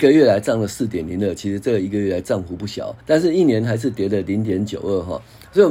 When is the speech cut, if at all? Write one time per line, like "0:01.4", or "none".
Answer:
0:03.0